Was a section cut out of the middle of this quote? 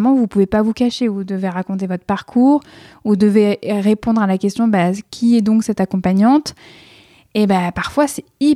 no; 0 cuts

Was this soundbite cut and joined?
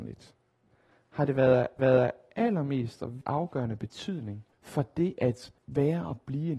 yes; 4 cuts; at 1.8 s, 3.2 s, 4.5 s, 5.6 s

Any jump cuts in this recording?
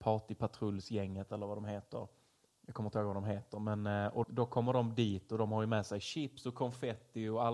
yes; 1 cut; at 4.2 s

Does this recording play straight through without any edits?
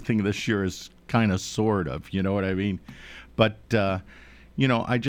yes; 0 cuts

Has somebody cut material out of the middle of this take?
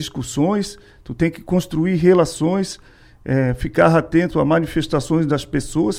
no; 0 cuts

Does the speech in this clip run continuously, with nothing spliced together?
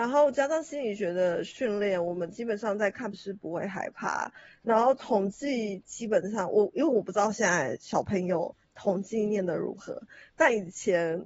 no; 1 cut; at 3.1 s

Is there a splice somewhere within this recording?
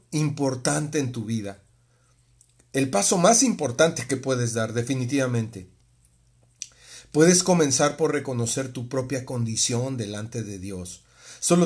no; 0 cuts

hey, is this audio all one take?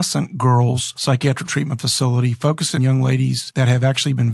no; 2 cuts; at 1.5 s, 2.8 s

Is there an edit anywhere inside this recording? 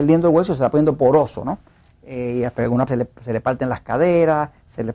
yes; 1 cut; at 2.9 s

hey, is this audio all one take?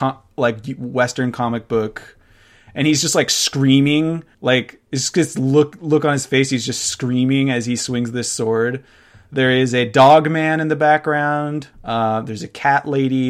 no; 2 cuts; at 4.3 s, 11.7 s

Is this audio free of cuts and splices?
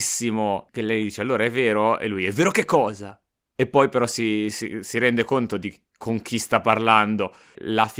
yes; 0 cuts

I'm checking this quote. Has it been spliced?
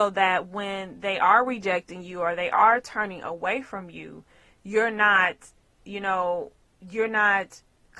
no; 0 cuts

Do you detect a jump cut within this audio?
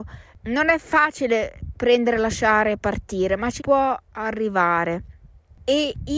yes; 1 cut; at 3.6 s

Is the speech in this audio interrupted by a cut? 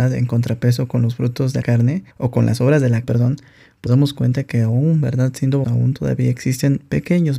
yes; 5 cuts; at 1.6 s, 2.1 s, 3.0 s, 3.9 s, 5.6 s

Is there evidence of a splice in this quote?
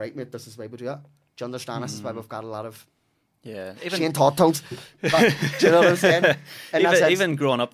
no; 0 cuts

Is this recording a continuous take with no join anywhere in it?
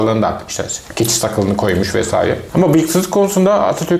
yes; 0 cuts

